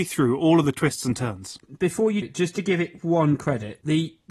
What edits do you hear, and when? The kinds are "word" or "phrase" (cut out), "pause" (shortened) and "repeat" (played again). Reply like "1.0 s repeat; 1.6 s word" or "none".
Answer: 2.2 s word